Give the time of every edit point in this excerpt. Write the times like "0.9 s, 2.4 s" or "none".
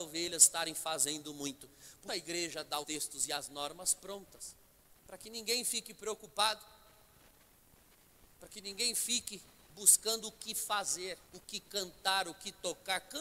2.1 s, 2.8 s, 11.3 s

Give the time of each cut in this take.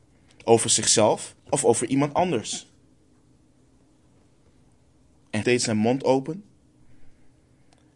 1.4 s, 5.4 s

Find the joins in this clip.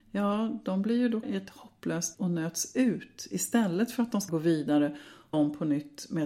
1.2 s, 2.1 s, 4.3 s, 5.3 s

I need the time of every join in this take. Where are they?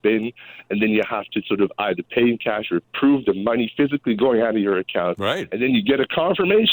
none

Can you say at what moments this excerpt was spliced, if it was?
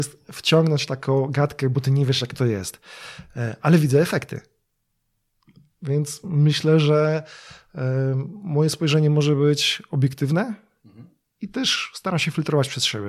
none

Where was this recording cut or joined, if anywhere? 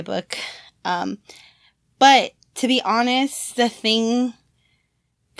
none

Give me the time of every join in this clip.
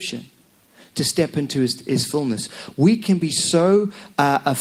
none

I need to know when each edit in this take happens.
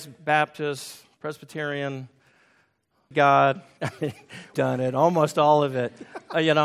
3.1 s, 4.5 s

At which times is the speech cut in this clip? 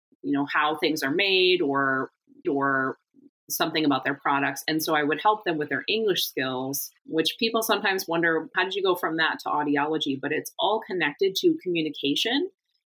2.4 s, 7.0 s

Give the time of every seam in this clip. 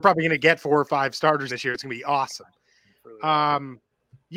1.5 s

